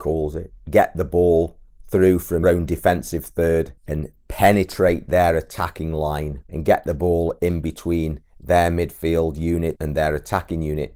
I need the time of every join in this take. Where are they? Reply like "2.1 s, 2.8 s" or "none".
2.4 s, 9.7 s